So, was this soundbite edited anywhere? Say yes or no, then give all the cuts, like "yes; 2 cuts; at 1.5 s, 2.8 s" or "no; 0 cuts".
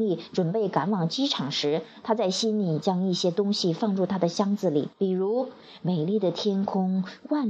yes; 1 cut; at 4.9 s